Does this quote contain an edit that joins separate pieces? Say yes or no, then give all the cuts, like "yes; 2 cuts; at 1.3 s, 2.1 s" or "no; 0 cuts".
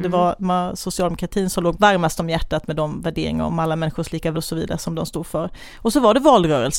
yes; 3 cuts; at 1.7 s, 3.5 s, 4.3 s